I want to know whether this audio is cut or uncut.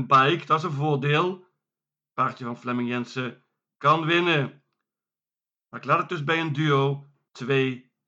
uncut